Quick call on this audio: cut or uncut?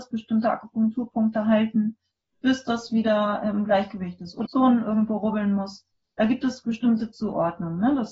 cut